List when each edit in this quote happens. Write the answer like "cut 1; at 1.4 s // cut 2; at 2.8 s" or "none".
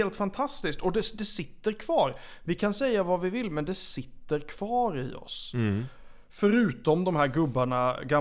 none